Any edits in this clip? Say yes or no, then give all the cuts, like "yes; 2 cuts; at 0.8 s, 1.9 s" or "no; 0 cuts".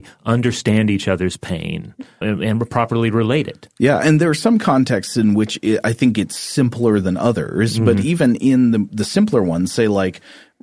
yes; 1 cut; at 2.2 s